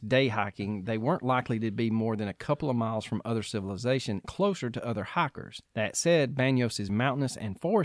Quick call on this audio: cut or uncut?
cut